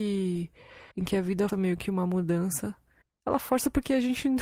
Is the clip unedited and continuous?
no; 3 cuts; at 0.9 s, 1.5 s, 3.0 s

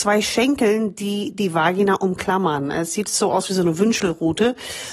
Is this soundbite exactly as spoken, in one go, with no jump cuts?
yes; 0 cuts

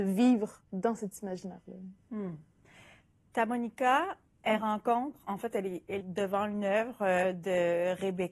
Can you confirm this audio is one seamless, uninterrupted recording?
no; 1 cut; at 6.0 s

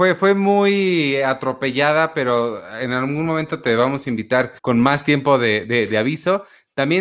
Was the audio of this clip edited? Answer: yes; 1 cut; at 4.6 s

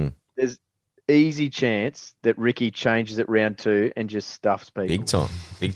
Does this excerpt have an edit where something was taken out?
no; 0 cuts

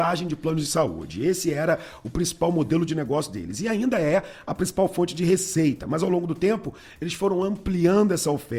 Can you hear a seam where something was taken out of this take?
no; 0 cuts

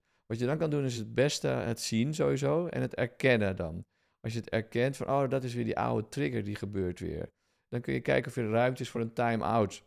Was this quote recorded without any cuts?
yes; 0 cuts

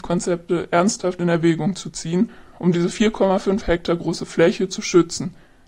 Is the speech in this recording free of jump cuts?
yes; 0 cuts

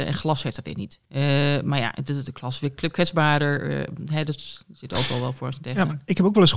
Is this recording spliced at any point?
yes; 1 cut; at 1.0 s

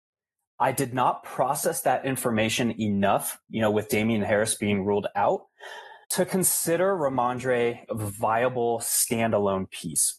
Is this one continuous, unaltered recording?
no; 2 cuts; at 6.0 s, 7.9 s

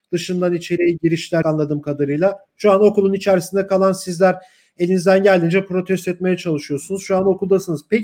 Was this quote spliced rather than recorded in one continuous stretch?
yes; 1 cut; at 1.4 s

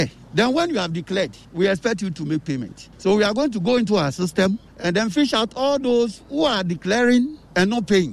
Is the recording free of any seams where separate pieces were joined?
yes; 0 cuts

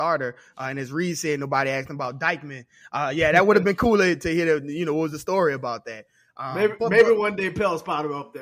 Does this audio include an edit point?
no; 0 cuts

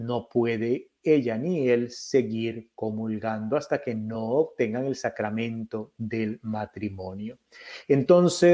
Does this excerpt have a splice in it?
no; 0 cuts

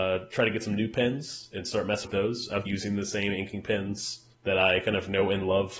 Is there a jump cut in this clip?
yes; 3 cuts; at 2.0 s, 2.7 s, 4.3 s

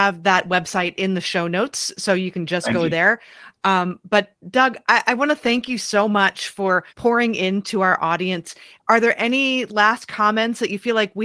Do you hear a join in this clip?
yes; 1 cut; at 6.9 s

